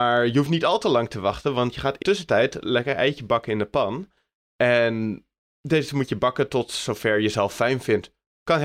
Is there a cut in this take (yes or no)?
yes